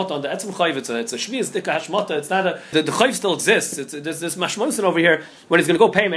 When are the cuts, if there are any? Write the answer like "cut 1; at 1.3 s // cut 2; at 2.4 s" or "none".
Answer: cut 1; at 2.7 s